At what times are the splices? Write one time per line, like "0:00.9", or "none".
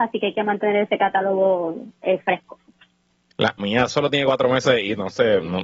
0:03.6